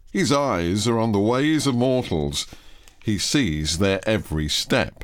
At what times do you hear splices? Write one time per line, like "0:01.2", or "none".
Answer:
none